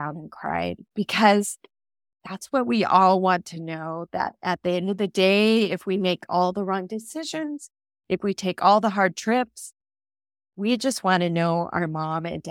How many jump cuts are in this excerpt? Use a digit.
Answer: 0